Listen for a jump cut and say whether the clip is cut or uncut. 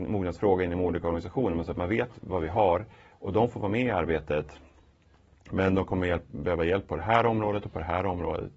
uncut